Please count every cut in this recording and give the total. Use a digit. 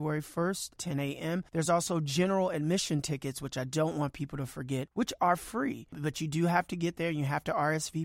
0